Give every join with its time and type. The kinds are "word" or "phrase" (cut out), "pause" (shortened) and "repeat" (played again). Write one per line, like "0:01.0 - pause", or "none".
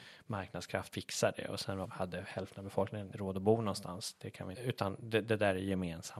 0:00.9 - word
0:01.8 - word
0:03.1 - word
0:04.5 - phrase